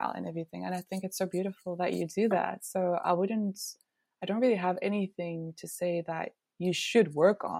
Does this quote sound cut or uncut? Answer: uncut